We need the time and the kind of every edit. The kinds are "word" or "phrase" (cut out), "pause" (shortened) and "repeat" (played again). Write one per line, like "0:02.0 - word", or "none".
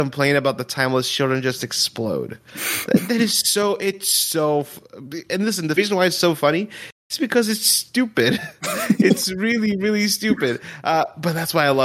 0:07.0 - pause